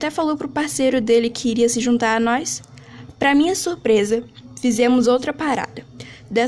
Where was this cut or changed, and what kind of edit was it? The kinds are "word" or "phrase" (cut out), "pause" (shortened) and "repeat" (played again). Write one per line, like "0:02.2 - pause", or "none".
none